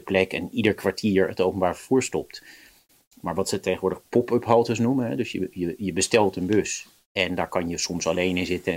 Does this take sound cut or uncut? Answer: uncut